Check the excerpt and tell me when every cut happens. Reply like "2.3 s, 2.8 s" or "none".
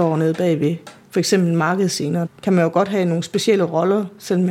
2.3 s